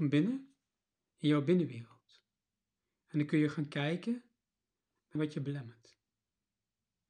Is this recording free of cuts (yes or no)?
no